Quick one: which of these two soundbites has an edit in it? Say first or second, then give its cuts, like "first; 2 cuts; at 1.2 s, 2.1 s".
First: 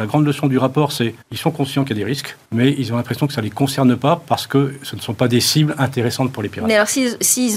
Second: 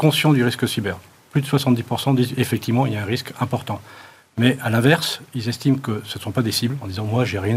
first; 2 cuts; at 1.2 s, 2.4 s